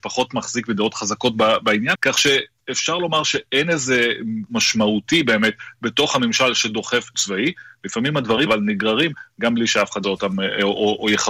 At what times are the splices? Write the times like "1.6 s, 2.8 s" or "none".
1.9 s, 4.5 s, 7.1 s, 8.5 s, 10.0 s